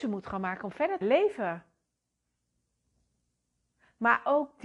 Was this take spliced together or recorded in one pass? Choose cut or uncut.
cut